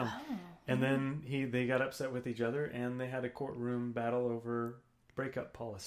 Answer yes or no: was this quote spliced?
no